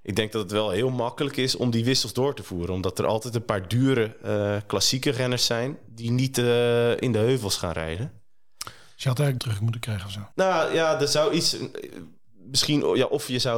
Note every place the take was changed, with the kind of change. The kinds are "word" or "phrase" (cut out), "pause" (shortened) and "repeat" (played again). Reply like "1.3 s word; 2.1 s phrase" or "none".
9.4 s phrase; 10.3 s pause